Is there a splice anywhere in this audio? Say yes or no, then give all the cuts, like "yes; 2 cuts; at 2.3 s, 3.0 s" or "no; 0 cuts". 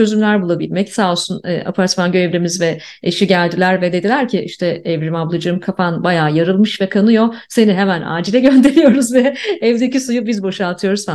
no; 0 cuts